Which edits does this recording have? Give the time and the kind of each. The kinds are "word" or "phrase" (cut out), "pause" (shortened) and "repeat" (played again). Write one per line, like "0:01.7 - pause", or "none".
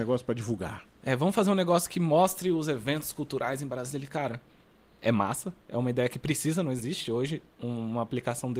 none